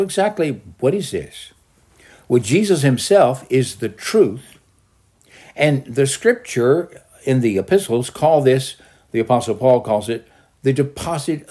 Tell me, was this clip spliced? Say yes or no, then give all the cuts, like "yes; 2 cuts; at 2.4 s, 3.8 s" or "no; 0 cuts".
no; 0 cuts